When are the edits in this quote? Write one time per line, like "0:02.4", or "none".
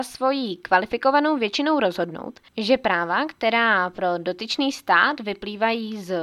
0:02.5